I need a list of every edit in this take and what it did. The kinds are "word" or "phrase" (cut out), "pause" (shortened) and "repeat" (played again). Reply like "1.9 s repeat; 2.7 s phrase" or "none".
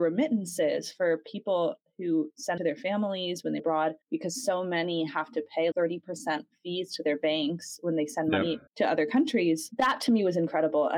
2.6 s phrase; 3.6 s word; 4.0 s pause; 5.7 s word; 8.7 s pause